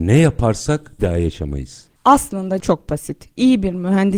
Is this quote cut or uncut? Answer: cut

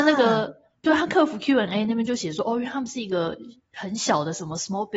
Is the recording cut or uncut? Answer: uncut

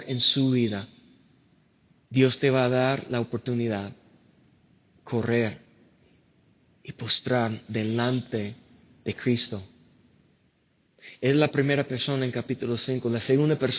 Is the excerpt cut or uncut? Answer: uncut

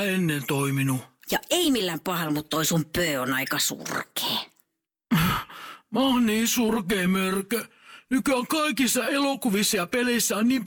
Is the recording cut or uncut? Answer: uncut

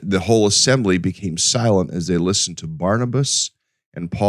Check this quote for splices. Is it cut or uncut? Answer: uncut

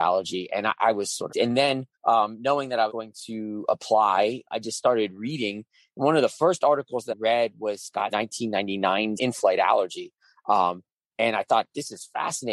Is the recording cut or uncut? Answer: cut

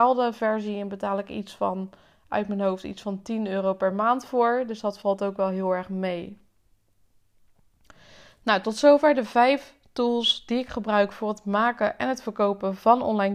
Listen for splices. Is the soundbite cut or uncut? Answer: uncut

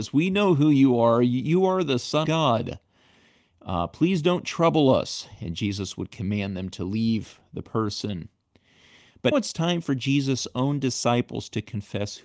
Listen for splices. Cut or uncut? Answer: cut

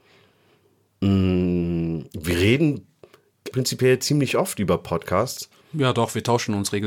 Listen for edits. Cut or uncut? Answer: cut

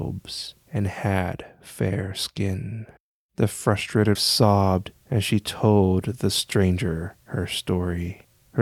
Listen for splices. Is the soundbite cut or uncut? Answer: cut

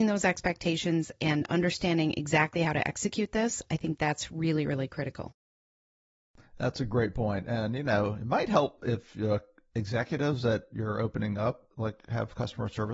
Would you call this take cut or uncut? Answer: uncut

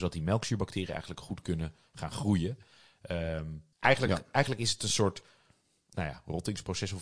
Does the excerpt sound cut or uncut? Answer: cut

